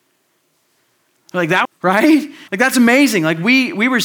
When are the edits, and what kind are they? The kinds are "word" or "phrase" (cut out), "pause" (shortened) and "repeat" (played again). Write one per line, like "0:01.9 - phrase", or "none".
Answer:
0:01.6 - phrase
0:02.5 - pause